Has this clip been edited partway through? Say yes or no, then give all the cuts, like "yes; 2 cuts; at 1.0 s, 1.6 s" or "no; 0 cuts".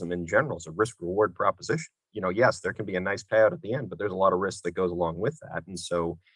no; 0 cuts